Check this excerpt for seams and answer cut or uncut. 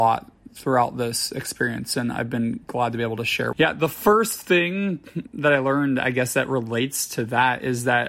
cut